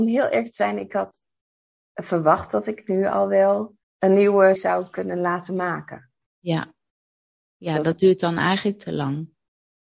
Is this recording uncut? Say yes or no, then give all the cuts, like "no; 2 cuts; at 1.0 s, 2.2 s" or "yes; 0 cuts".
no; 2 cuts; at 3.8 s, 4.6 s